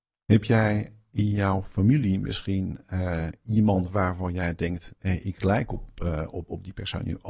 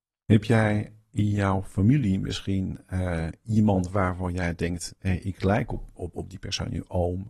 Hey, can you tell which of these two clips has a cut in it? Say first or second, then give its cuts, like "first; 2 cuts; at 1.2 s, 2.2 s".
second; 1 cut; at 6.0 s